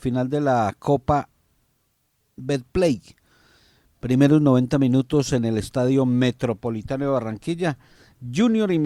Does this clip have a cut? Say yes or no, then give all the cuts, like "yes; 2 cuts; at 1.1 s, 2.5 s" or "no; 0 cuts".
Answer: no; 0 cuts